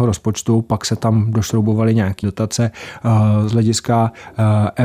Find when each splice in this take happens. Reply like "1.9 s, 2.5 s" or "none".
2.2 s